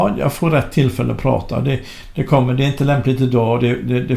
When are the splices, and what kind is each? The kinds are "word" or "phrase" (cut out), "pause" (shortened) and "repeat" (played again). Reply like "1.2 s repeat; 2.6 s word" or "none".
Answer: none